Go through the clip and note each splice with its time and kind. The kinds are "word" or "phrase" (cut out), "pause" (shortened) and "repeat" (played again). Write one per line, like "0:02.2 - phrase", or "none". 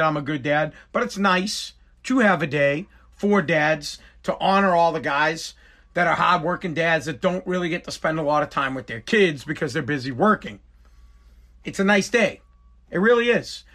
none